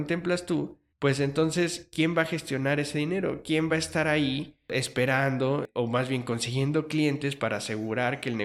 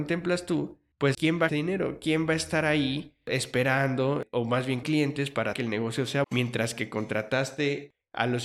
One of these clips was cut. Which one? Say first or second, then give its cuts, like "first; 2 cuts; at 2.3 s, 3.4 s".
second; 5 cuts; at 1.1 s, 1.5 s, 4.8 s, 5.5 s, 6.2 s